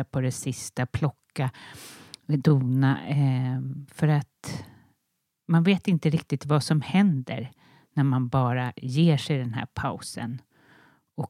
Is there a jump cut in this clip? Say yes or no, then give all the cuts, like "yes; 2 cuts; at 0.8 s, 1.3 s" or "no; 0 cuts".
no; 0 cuts